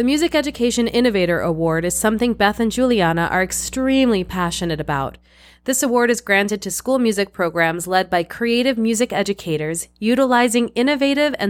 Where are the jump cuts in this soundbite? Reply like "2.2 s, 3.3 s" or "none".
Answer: none